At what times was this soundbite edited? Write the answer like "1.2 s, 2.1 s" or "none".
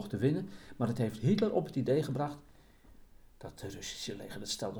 none